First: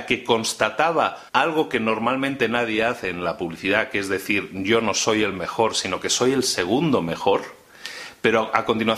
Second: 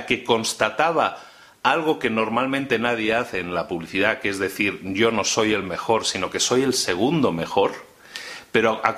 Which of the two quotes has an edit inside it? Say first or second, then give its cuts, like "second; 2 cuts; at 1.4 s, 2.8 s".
first; 1 cut; at 1.3 s